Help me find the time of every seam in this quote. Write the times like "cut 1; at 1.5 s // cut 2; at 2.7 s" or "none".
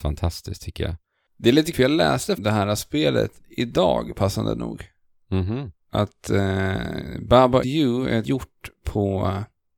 cut 1; at 1.7 s // cut 2; at 2.4 s // cut 3; at 5.8 s // cut 4; at 7.6 s // cut 5; at 8.2 s